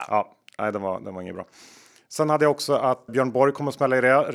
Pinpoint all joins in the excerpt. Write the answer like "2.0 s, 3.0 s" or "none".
3.1 s